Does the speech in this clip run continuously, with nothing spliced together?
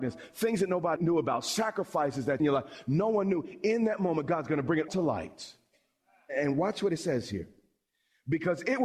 no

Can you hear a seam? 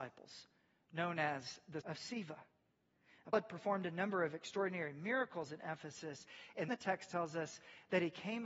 yes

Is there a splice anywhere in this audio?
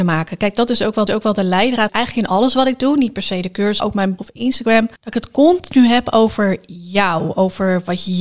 yes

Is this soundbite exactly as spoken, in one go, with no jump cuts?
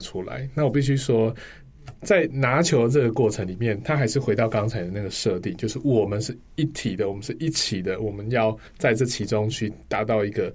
no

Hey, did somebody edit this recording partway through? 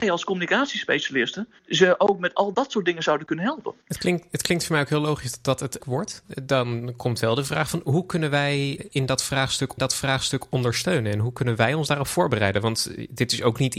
yes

